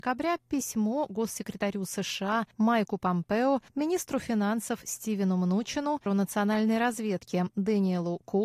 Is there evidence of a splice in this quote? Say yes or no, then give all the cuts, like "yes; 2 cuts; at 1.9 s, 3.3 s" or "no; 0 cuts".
yes; 3 cuts; at 2.5 s, 3.7 s, 6.1 s